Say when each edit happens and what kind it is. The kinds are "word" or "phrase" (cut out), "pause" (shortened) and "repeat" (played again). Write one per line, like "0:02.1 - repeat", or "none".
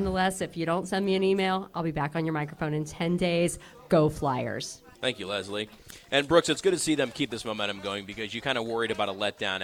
0:04.9 - pause

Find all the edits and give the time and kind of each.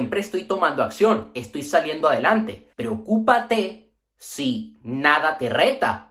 0:02.7 - pause

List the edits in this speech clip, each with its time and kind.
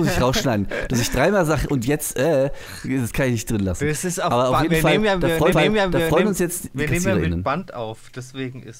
0:05.5 - repeat

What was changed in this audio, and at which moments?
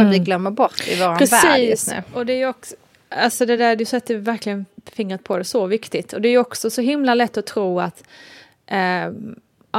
none

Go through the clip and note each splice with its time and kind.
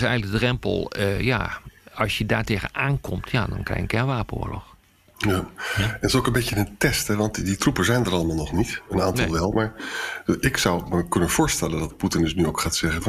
none

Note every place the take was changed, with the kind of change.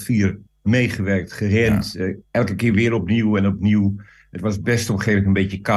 none

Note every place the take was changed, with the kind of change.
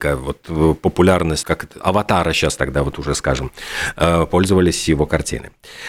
0:01.4 - word

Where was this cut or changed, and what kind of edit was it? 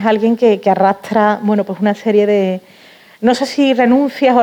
none

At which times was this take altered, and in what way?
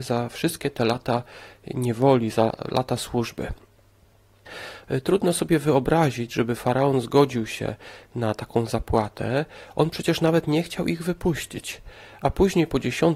none

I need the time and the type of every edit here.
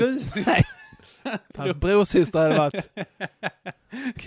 0:01.5 - word

